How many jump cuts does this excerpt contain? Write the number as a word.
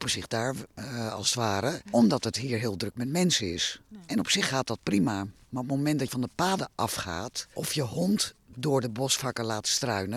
one